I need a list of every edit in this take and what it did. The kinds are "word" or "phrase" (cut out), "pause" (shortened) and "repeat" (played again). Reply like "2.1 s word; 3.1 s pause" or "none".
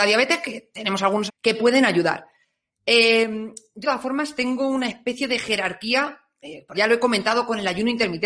1.3 s word; 3.8 s word; 6.7 s word